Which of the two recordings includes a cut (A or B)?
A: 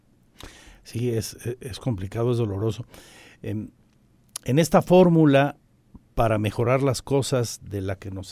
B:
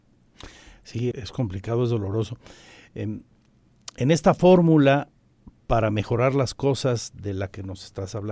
B